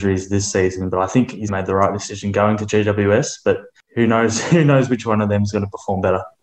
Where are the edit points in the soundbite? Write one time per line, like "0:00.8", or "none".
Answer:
0:01.5